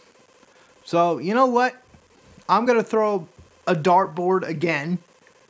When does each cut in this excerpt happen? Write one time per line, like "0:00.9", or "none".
none

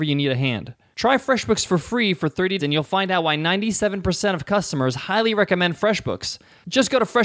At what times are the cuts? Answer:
0:02.6

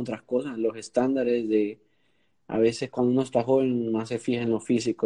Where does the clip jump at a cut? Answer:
none

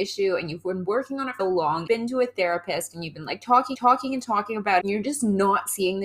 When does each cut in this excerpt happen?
0:01.4
0:01.9
0:03.7
0:04.8

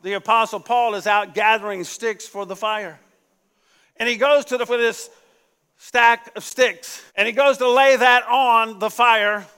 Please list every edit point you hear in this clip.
0:04.7
0:07.1

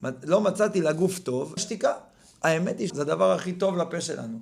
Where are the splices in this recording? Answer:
0:01.6
0:02.9

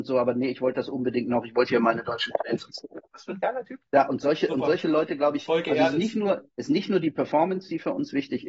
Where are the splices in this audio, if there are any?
0:03.9
0:06.5

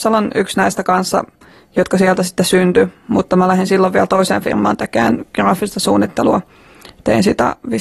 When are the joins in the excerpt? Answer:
none

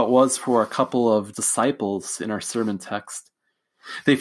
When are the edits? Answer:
0:01.3

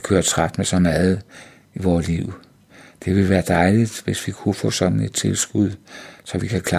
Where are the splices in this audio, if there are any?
none

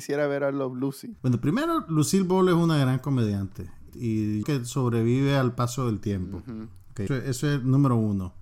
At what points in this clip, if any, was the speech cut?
0:03.9
0:04.4
0:07.1

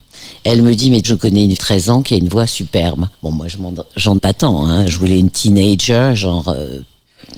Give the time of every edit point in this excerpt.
0:01.0
0:01.6
0:03.1
0:04.2

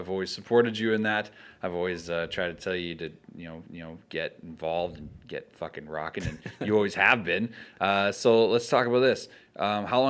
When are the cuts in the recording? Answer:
0:03.7

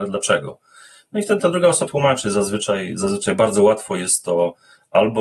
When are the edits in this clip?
0:01.4
0:01.9

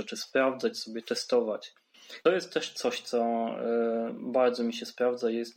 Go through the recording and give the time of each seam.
0:02.3

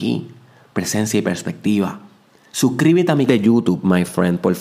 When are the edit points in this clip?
0:02.3
0:03.3

